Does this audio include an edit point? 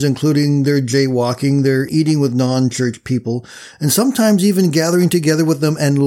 no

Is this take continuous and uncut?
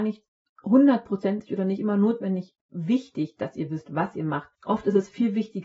no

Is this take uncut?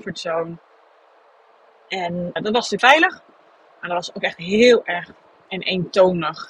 no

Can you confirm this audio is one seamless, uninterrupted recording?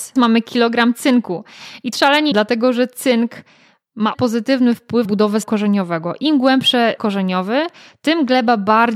no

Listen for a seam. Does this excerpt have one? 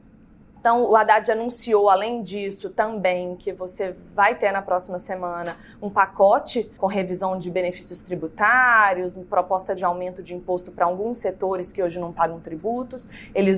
yes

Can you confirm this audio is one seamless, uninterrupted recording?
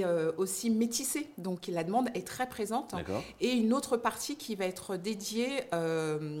yes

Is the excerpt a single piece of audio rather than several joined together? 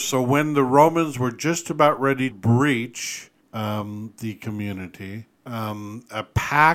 no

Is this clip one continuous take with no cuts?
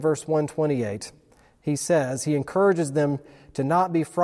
yes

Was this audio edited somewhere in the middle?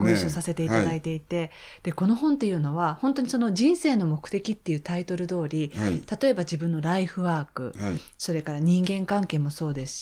no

